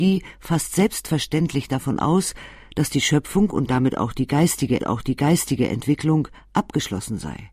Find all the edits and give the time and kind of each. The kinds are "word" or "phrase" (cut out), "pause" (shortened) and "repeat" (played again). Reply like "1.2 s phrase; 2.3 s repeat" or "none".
4.8 s repeat